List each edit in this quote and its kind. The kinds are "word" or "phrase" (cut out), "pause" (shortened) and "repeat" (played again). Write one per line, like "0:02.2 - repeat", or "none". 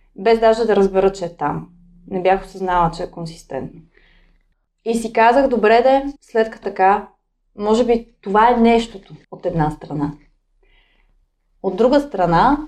0:06.2 - pause
0:06.6 - word
0:09.2 - pause